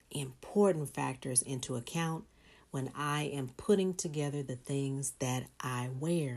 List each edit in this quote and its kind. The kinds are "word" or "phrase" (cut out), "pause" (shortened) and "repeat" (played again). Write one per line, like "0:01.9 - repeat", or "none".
none